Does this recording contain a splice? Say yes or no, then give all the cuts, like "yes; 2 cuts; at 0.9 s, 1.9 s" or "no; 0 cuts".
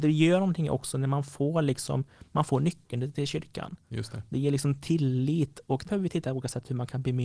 yes; 1 cut; at 5.8 s